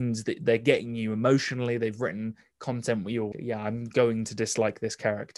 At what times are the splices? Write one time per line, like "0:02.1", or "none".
0:03.3